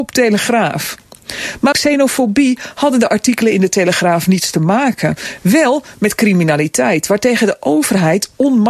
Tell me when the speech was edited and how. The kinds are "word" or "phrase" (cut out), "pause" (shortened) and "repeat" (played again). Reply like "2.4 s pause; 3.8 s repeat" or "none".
1.7 s word

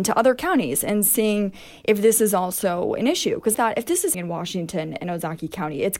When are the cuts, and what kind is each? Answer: 3.5 s word; 4.1 s word

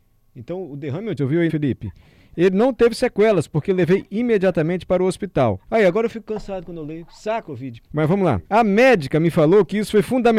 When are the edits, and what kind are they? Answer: 1.2 s phrase; 1.5 s word; 5.6 s pause; 7.4 s phrase; 7.8 s pause; 8.4 s pause

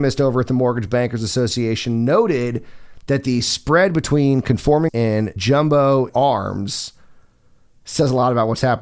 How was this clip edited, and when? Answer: 4.9 s word; 5.4 s word; 6.1 s word

